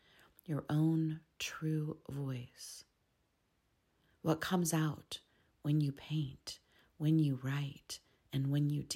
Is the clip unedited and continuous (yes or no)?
yes